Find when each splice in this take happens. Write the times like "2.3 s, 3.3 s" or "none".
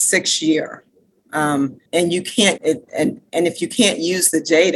1.9 s, 2.6 s